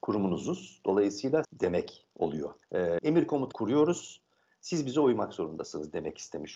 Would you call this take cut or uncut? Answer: cut